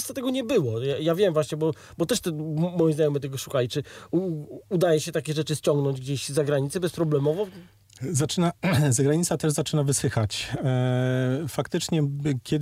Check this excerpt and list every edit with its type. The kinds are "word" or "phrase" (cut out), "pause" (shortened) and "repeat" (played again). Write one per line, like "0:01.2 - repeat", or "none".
none